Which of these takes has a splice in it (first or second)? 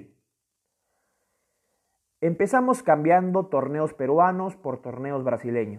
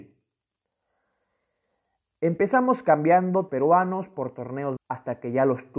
second